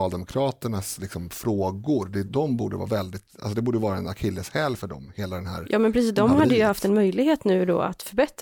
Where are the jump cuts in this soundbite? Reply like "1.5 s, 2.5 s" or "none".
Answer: 2.3 s, 3.3 s